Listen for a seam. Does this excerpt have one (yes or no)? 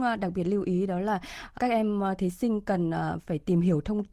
yes